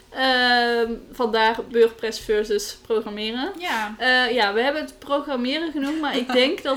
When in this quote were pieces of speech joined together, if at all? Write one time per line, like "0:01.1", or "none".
none